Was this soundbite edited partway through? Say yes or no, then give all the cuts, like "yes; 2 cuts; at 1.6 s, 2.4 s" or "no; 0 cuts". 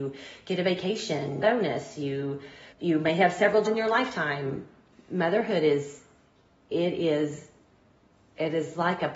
yes; 4 cuts; at 1.4 s, 2.7 s, 3.6 s, 4.9 s